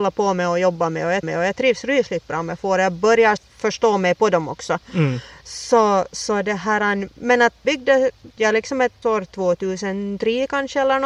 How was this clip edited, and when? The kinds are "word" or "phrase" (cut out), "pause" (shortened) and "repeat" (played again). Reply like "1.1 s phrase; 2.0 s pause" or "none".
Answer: 1.2 s repeat; 3.4 s word; 7.6 s word; 8.4 s word; 9.0 s word